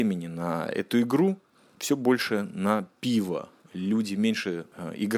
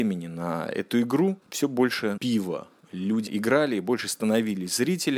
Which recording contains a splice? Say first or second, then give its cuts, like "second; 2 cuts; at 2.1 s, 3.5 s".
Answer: second; 3 cuts; at 1.4 s, 2.2 s, 3.3 s